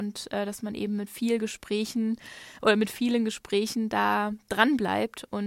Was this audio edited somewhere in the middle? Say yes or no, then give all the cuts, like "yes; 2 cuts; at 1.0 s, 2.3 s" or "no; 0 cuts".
no; 0 cuts